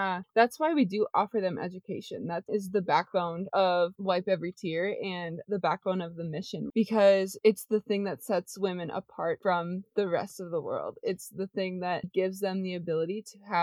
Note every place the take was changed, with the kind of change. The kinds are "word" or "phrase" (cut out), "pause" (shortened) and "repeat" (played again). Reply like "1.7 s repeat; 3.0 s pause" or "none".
6.7 s word; 12.0 s word